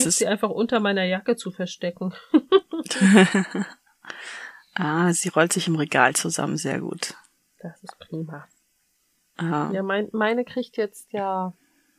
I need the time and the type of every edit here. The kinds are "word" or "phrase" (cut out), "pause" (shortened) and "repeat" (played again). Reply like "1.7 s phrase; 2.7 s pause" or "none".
none